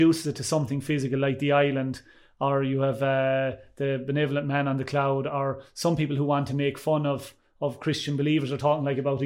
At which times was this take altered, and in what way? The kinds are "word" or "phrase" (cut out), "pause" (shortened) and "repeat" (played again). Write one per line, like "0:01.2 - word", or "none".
none